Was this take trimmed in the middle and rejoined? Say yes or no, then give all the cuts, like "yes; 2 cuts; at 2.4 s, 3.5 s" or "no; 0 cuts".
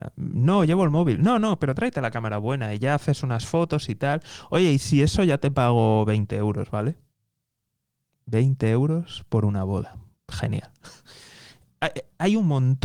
no; 0 cuts